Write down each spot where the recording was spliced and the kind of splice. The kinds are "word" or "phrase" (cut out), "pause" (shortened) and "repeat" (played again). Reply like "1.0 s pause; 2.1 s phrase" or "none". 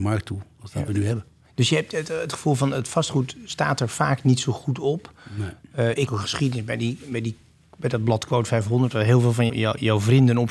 6.1 s word; 8.3 s word; 9.5 s word